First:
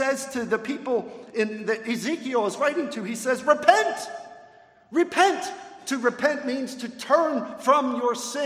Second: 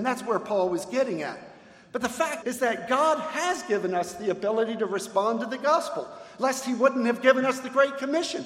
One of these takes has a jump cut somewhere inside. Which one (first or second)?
second